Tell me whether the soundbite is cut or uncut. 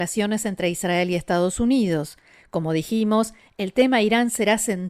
uncut